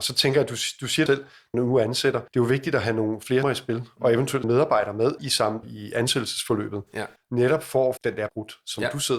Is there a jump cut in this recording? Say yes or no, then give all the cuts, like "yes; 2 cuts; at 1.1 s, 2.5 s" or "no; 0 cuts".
yes; 9 cuts; at 1.1 s, 1.5 s, 2.3 s, 3.4 s, 4.4 s, 5.2 s, 5.6 s, 8.0 s, 8.3 s